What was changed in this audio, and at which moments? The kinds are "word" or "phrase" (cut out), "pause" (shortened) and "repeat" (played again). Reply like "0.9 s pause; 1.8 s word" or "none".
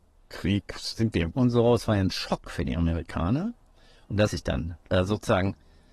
1.3 s word; 4.3 s word